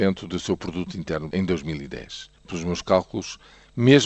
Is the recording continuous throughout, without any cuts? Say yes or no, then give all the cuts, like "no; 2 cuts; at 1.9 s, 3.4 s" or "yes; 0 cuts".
no; 2 cuts; at 1.3 s, 2.4 s